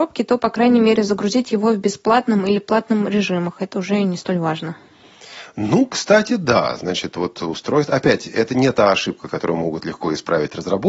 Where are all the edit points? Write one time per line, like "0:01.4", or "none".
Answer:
none